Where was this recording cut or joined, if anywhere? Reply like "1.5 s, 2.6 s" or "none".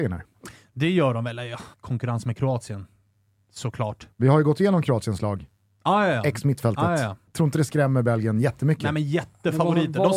1.7 s, 4.1 s, 7.3 s